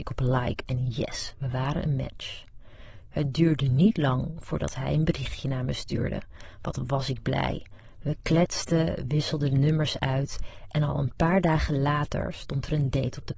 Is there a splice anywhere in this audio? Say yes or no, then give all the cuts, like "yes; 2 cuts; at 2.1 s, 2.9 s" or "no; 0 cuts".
no; 0 cuts